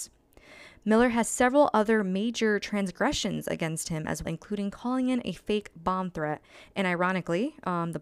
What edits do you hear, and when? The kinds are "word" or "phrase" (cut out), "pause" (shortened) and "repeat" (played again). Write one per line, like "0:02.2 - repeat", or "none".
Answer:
0:04.2 - word